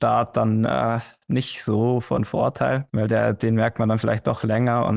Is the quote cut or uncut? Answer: cut